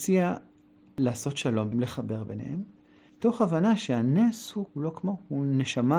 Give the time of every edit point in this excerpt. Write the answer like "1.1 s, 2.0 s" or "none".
1.7 s, 4.7 s